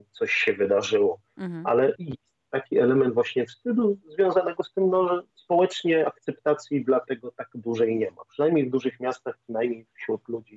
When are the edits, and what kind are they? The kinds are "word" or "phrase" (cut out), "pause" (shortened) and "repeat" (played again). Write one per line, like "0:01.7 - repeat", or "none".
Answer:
0:02.0 - word
0:05.3 - pause